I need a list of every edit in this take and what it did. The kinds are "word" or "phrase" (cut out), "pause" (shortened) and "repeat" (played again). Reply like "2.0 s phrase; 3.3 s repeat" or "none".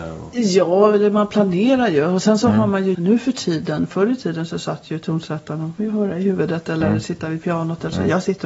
2.9 s word